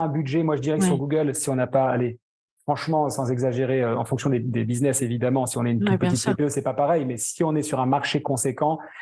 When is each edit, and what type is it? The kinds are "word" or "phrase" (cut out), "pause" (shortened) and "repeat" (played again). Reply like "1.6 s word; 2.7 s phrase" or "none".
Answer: none